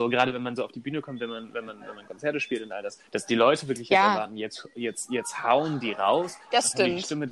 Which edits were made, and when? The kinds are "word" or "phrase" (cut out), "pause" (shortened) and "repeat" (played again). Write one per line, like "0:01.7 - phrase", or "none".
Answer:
0:03.1 - pause